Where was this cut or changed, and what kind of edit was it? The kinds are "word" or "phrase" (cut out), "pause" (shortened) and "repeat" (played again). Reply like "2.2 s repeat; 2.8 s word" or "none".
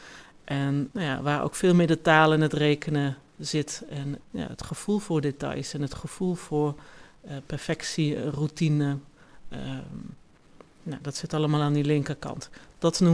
none